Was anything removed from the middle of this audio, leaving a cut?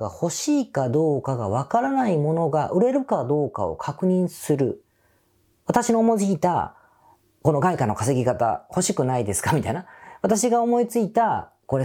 no; 0 cuts

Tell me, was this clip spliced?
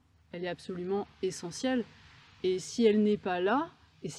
no; 0 cuts

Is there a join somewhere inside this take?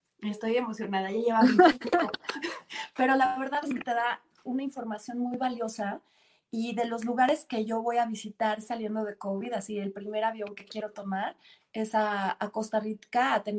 no; 0 cuts

